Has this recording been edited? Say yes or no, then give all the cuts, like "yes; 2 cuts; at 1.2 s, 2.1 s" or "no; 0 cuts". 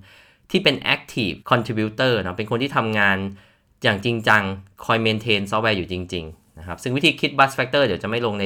yes; 1 cut; at 1.4 s